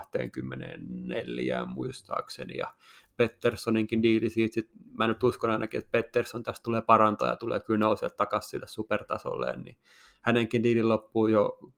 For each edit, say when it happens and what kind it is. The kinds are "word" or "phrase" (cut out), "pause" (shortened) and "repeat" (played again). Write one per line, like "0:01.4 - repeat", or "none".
none